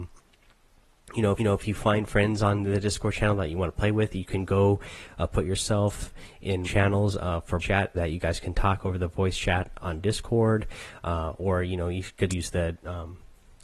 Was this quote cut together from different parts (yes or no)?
yes